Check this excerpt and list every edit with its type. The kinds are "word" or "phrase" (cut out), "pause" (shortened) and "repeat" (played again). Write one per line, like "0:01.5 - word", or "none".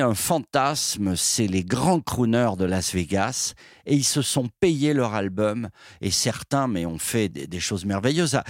0:07.3 - word